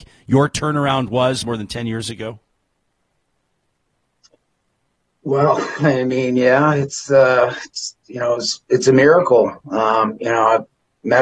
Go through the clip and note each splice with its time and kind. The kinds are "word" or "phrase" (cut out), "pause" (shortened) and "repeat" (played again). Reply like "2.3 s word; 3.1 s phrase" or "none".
none

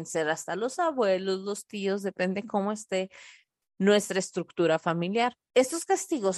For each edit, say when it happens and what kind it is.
none

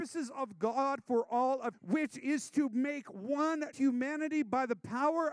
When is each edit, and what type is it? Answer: 1.7 s word; 3.7 s word

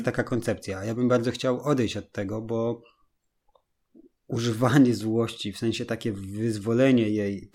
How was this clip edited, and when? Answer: none

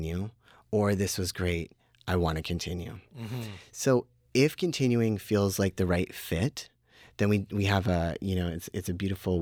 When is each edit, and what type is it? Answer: none

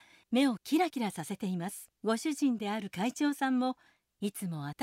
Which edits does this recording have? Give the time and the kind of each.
2.0 s pause

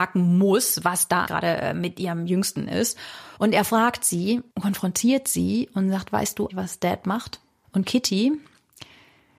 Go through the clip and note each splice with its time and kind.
1.3 s word; 3.4 s pause; 4.5 s pause; 6.5 s word; 7.6 s pause

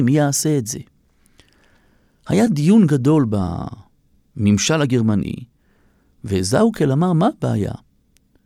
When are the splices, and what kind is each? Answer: none

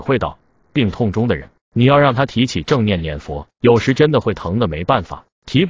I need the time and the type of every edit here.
3.5 s pause

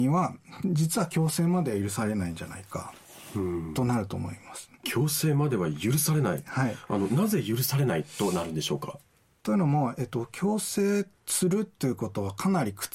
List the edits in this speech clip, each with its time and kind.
none

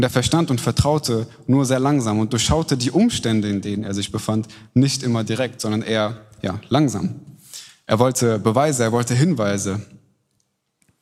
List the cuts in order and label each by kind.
none

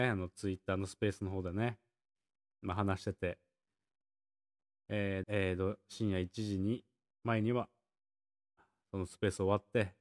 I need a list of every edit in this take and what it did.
5.2 s word

